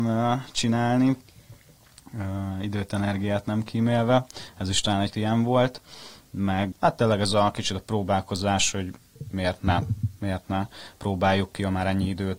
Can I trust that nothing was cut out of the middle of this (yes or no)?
no